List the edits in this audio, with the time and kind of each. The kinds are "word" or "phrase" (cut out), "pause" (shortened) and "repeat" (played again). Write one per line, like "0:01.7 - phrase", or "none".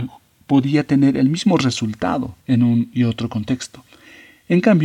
0:02.4 - pause

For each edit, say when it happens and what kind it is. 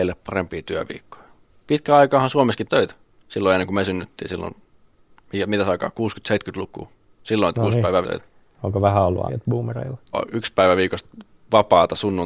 0:02.7 - phrase
0:03.1 - pause
0:07.5 - word
0:08.0 - word
0:09.3 - word
0:10.1 - word

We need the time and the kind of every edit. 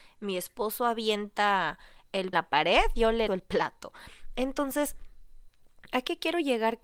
0:02.3 - phrase
0:03.3 - word

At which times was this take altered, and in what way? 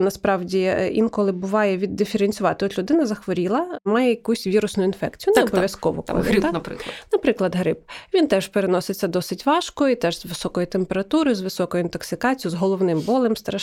none

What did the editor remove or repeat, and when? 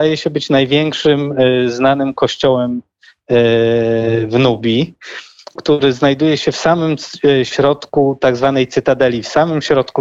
0:05.6 - phrase

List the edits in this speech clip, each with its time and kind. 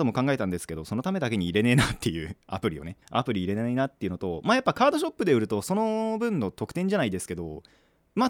0:03.0 - pause

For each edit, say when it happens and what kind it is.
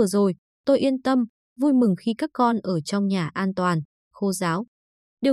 none

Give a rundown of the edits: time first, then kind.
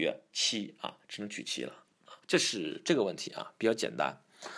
0:02.2 - pause

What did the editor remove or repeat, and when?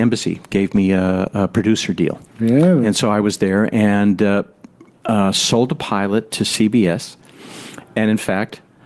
none

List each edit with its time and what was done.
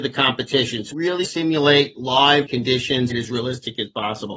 0:00.9 - word
0:01.2 - phrase
0:02.5 - word
0:03.1 - phrase

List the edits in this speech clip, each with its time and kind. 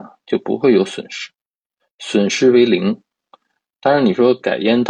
none

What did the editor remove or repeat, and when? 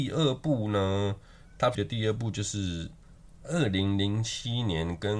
0:01.7 - word

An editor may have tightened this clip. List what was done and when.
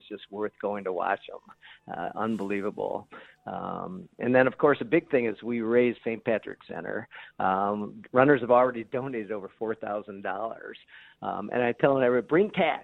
0:06.0 - phrase
0:06.7 - word

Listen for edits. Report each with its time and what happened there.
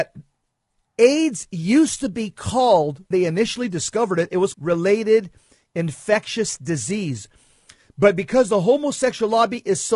0:03.1 - word
0:04.5 - phrase

